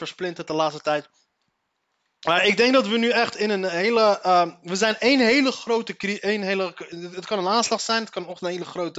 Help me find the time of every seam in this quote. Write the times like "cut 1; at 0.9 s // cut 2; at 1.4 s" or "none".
cut 1; at 1.4 s